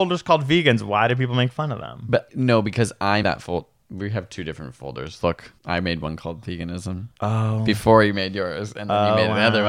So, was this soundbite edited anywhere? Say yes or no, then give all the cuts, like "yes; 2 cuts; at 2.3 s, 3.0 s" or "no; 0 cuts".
yes; 4 cuts; at 2.3 s, 3.2 s, 5.6 s, 7.2 s